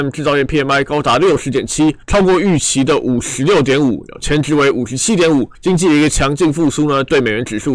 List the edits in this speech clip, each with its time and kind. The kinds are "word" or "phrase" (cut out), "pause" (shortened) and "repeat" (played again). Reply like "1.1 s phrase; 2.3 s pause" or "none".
2.0 s pause; 5.5 s pause